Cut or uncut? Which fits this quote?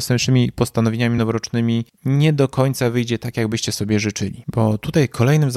uncut